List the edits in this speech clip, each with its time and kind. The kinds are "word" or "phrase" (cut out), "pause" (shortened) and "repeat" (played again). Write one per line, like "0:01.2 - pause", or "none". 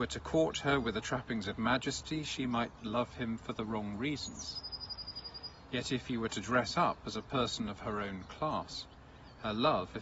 none